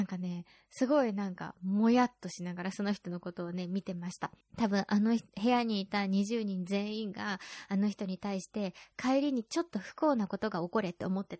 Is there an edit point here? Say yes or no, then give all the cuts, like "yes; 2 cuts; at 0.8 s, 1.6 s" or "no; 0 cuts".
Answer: yes; 1 cut; at 4.4 s